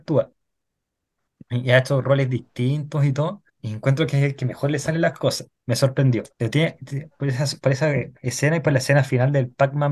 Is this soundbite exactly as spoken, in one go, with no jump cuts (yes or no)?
no